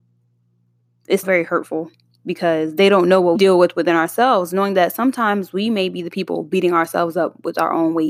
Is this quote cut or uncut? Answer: cut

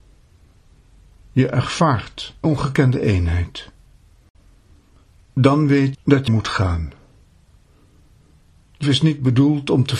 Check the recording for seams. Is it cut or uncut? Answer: cut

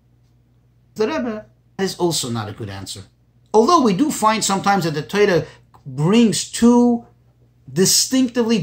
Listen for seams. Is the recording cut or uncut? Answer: cut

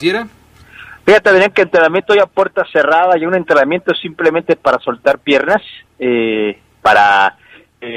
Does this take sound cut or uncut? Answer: uncut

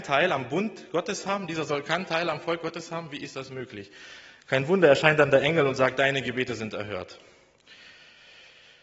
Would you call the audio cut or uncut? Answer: uncut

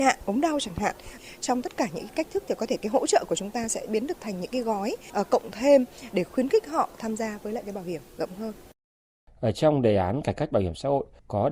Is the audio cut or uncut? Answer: uncut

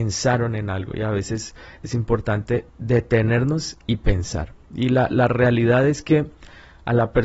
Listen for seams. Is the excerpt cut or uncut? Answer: cut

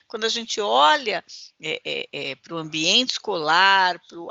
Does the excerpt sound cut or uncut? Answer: uncut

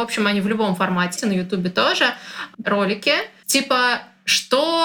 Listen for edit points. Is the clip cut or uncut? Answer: cut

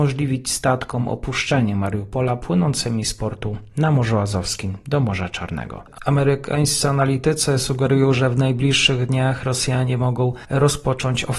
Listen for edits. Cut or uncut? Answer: uncut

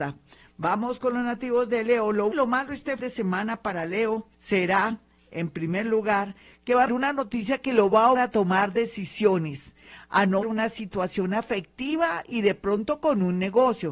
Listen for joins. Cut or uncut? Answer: cut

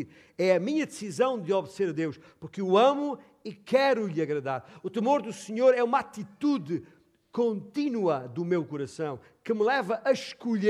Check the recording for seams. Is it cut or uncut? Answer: uncut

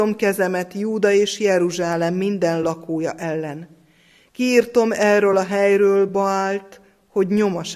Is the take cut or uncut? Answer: uncut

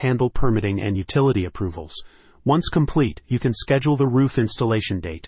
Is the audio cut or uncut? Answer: uncut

